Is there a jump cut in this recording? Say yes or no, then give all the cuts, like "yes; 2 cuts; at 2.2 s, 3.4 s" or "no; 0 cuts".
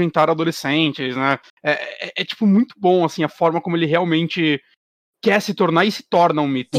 no; 0 cuts